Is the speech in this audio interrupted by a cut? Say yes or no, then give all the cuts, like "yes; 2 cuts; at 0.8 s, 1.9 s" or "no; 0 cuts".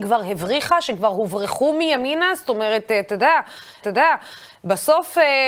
yes; 1 cut; at 3.8 s